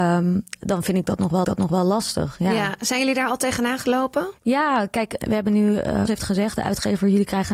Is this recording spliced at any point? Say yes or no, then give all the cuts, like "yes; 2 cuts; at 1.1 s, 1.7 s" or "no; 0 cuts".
yes; 4 cuts; at 1.4 s, 4.4 s, 5.2 s, 6.1 s